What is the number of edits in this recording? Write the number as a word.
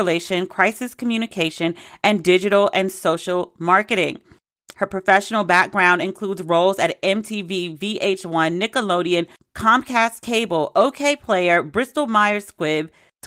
zero